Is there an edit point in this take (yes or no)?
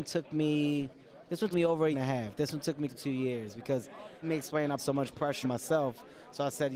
yes